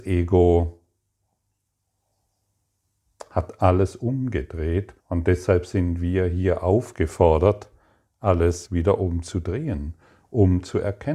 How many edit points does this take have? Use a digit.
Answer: 1